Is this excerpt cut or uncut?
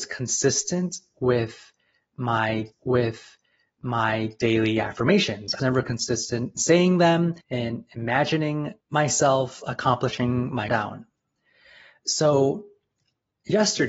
cut